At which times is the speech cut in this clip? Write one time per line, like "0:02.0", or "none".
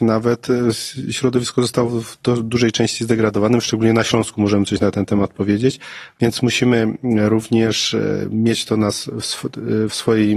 none